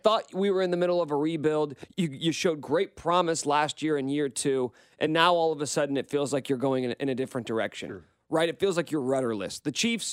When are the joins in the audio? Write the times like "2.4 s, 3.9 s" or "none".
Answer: none